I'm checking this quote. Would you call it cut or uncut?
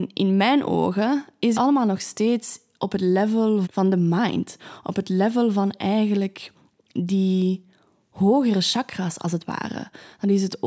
cut